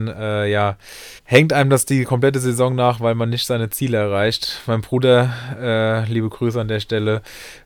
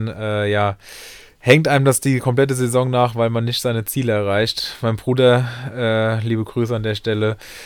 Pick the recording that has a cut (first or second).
first